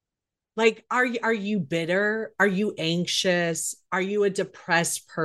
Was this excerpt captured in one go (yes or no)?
yes